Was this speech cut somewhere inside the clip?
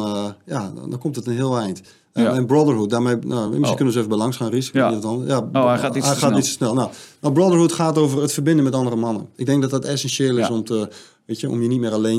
no; 0 cuts

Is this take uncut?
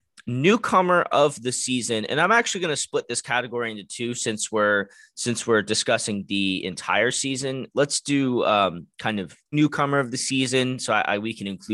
no; 1 cut; at 9.5 s

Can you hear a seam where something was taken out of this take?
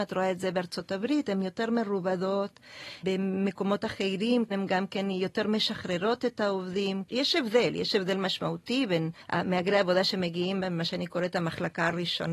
yes; 1 cut; at 9.2 s

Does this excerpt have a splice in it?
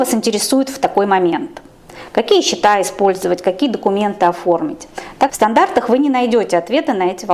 yes; 1 cut; at 5.3 s

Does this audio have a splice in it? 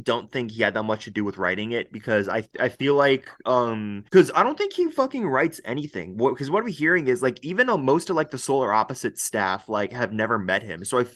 yes; 1 cut; at 4.1 s

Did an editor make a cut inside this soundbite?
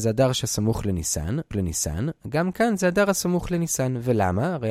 yes; 1 cut; at 1.5 s

